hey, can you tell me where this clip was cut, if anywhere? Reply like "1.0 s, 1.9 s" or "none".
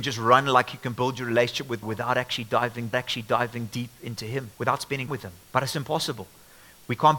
1.8 s, 2.9 s, 4.5 s, 5.1 s, 5.4 s